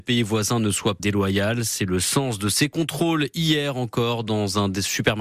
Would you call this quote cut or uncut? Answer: cut